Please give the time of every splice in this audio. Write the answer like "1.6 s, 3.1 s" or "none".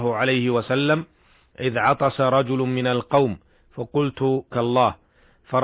4.5 s